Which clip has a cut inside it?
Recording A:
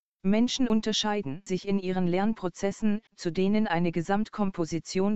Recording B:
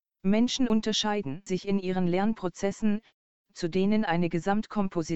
A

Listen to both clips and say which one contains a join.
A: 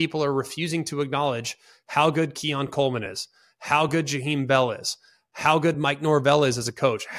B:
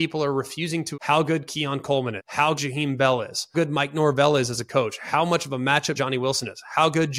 B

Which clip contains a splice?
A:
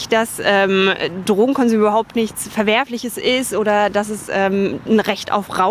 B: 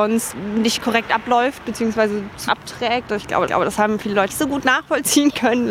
B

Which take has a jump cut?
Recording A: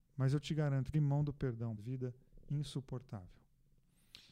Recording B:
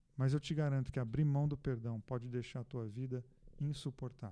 A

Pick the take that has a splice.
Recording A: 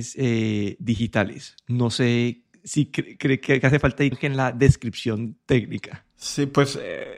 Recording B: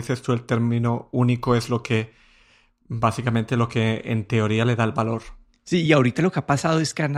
A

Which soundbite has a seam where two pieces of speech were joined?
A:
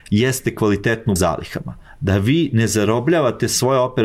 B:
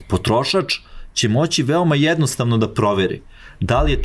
A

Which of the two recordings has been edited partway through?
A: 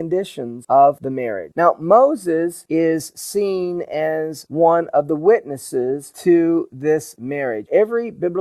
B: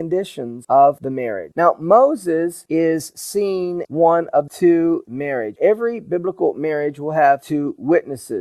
B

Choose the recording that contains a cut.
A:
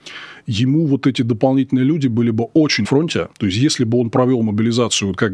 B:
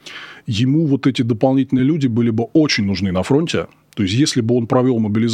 A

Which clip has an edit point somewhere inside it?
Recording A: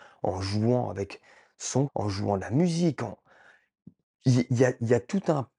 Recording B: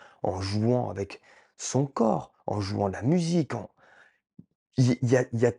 A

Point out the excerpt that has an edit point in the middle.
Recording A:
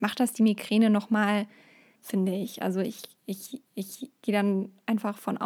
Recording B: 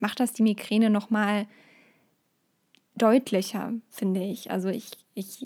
A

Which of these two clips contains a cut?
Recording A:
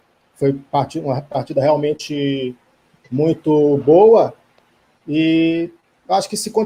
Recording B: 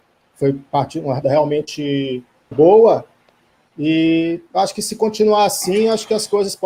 B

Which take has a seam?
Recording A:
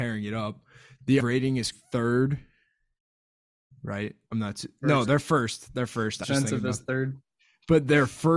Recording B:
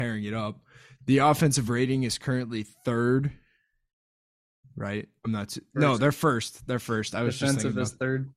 A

